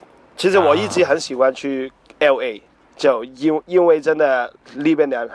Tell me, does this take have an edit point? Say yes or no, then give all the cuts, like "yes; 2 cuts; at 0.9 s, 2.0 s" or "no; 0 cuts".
no; 0 cuts